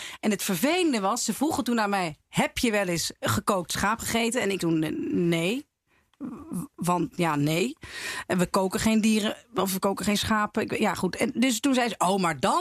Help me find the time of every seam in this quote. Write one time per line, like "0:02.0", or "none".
0:04.6